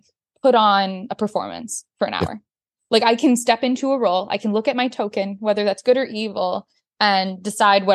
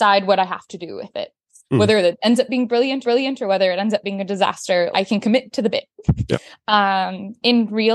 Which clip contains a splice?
second; 2 cuts; at 3.0 s, 4.9 s

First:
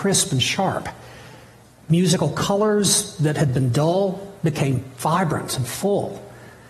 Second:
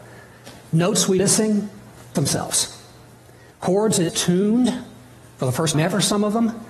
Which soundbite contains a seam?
second; 4 cuts; at 1.2 s, 2.1 s, 4.1 s, 5.7 s

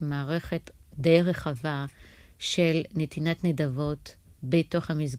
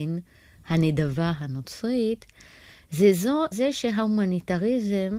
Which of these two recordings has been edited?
second; 2 cuts; at 1.4 s, 3.5 s

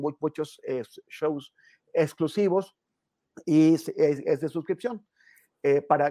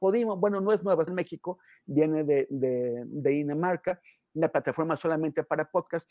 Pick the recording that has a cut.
second; 1 cut; at 1.1 s

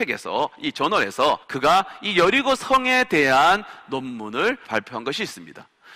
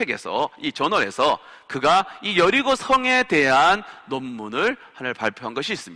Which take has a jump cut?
first; 2 cuts; at 1.4 s, 4.6 s

